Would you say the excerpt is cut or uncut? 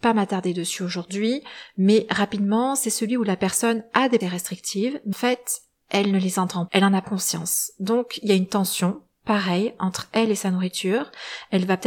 cut